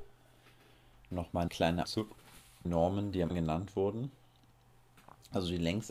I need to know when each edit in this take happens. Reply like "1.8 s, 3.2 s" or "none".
1.5 s, 1.8 s, 2.6 s, 3.3 s